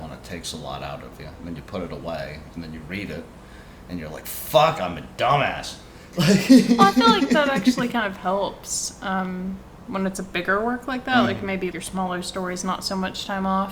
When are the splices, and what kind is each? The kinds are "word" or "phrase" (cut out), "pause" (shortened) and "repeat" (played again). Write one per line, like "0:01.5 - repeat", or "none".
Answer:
0:11.7 - word